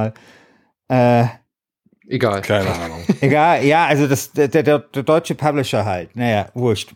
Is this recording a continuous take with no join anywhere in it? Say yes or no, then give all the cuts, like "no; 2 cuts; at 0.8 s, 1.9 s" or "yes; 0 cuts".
yes; 0 cuts